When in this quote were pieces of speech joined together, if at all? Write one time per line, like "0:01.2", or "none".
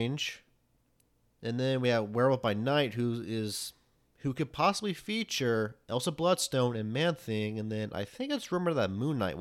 none